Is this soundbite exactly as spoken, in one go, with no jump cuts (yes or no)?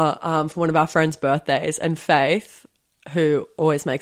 yes